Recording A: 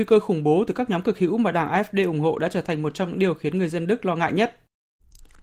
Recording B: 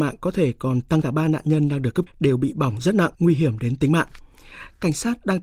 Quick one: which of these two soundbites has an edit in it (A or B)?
B